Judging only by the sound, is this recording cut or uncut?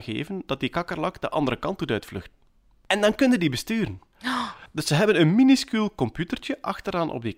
uncut